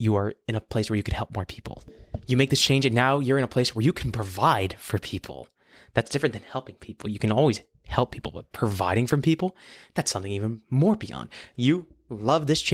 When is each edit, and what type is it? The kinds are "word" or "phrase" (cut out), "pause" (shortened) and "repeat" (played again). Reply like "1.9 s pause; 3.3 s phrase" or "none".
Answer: none